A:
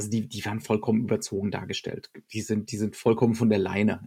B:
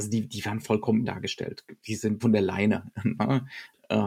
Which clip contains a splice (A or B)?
B